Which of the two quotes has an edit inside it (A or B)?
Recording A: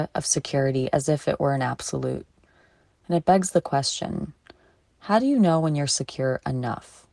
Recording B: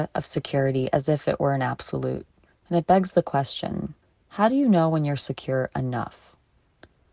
B